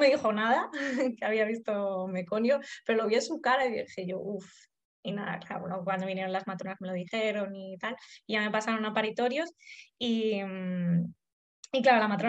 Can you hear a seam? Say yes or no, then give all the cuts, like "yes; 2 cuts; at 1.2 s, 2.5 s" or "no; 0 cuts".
no; 0 cuts